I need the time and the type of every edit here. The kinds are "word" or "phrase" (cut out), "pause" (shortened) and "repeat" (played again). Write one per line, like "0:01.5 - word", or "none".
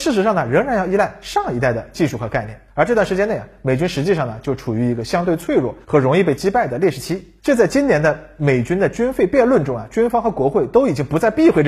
0:02.7 - pause
0:05.8 - pause
0:07.4 - pause